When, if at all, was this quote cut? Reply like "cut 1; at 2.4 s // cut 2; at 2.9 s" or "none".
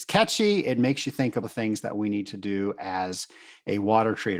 cut 1; at 1.4 s